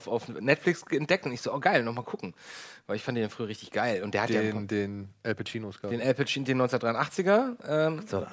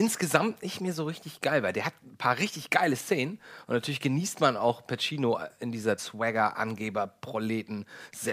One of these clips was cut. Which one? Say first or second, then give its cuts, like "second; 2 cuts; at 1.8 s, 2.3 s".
second; 1 cut; at 6.0 s